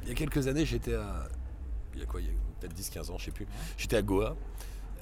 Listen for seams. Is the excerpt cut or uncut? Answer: uncut